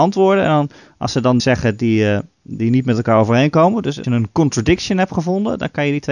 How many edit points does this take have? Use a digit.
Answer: 2